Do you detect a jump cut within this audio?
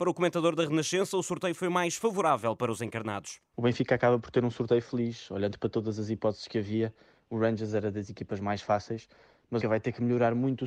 yes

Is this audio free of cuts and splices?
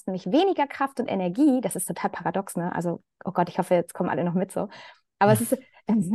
yes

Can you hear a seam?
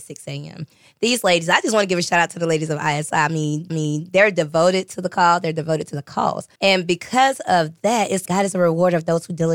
yes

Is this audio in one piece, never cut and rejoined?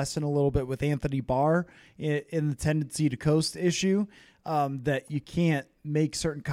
yes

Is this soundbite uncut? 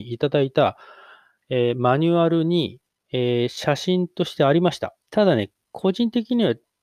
no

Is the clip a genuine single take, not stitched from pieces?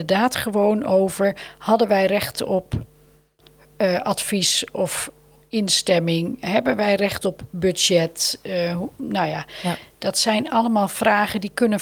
yes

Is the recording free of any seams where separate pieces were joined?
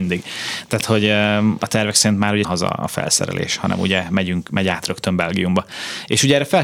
no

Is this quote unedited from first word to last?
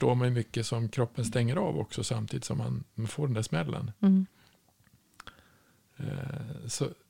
no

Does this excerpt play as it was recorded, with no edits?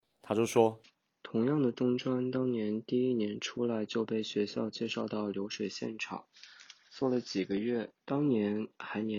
no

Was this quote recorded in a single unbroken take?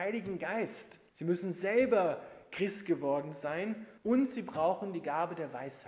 no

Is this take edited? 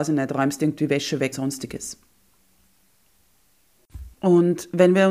yes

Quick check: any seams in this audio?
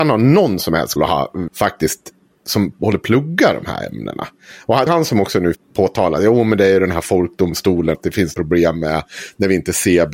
yes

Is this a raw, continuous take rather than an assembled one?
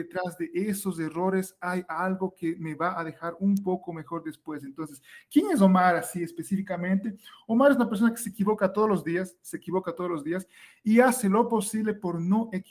yes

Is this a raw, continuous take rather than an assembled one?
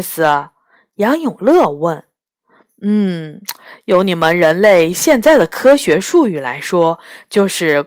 yes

